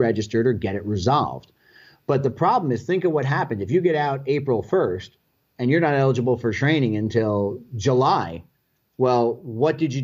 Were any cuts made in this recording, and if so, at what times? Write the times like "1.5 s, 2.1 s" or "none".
none